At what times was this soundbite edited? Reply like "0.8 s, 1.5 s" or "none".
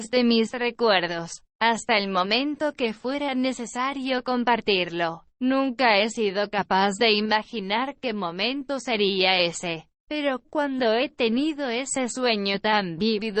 1.5 s, 5.3 s, 10.0 s